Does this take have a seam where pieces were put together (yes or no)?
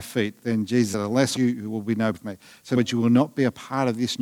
yes